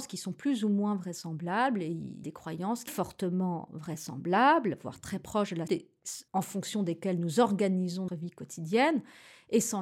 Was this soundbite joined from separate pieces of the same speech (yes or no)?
yes